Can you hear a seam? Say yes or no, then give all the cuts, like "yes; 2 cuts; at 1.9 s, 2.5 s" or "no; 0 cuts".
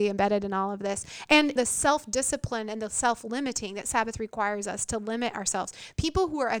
yes; 1 cut; at 1.6 s